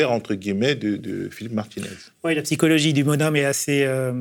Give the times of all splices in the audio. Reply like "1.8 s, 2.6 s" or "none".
none

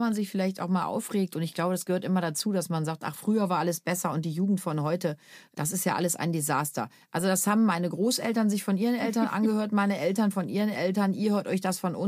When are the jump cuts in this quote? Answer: none

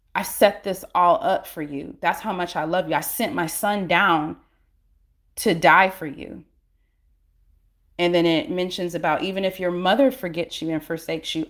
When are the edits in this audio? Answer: none

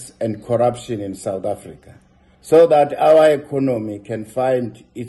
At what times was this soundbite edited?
none

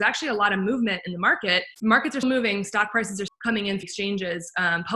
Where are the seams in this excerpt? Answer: 1.7 s, 2.2 s, 3.3 s, 3.8 s

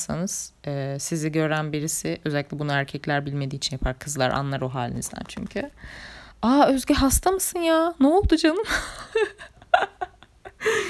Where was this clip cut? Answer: 6.3 s

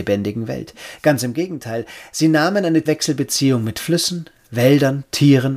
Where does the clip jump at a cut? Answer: 2.9 s

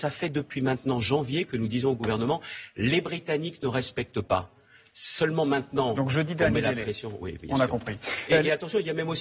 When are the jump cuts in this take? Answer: none

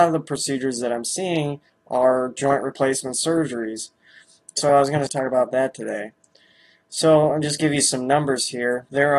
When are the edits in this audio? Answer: none

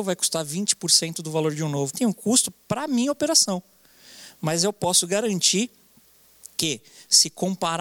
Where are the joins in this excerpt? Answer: 1.9 s

